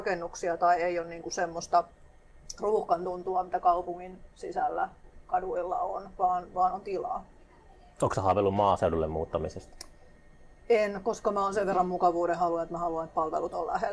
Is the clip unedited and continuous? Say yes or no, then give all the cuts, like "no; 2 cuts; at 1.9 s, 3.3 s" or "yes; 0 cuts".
yes; 0 cuts